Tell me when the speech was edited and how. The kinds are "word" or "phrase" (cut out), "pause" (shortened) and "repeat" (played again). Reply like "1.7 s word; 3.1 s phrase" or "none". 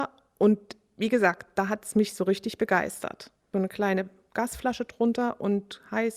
none